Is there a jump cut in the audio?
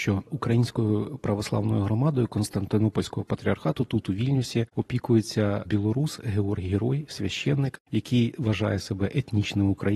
no; 0 cuts

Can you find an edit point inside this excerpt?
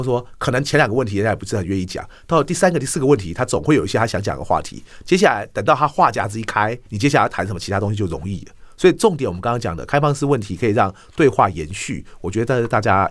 yes; 1 cut; at 6.8 s

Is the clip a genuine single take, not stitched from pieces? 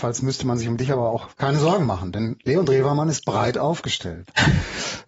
no; 1 cut; at 1.3 s

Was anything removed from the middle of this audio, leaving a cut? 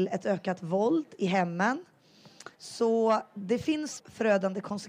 yes; 2 cuts; at 2.5 s, 4.0 s

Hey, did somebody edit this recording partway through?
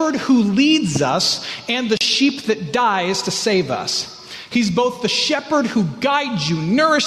no; 0 cuts

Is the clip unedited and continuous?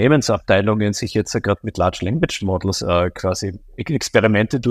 yes; 0 cuts

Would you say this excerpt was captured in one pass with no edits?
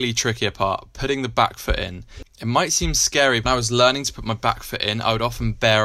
no; 1 cut; at 3.5 s

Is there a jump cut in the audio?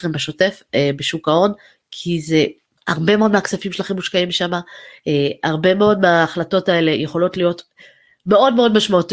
no; 0 cuts

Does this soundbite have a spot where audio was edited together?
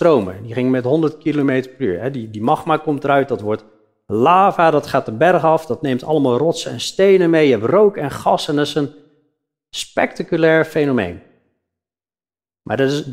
no; 0 cuts

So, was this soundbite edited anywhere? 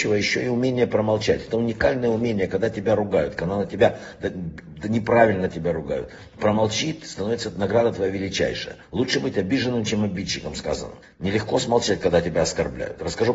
yes; 2 cuts; at 8.8 s, 11.0 s

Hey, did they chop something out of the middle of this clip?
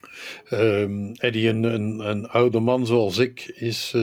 no; 0 cuts

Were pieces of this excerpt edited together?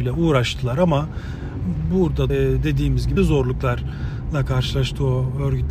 yes; 2 cuts; at 2.3 s, 3.2 s

